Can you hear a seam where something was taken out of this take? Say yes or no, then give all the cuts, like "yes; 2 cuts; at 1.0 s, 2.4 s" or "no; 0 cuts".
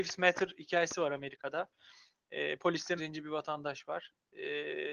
yes; 1 cut; at 3.0 s